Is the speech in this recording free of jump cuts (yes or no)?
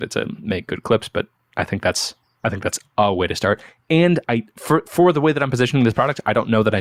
yes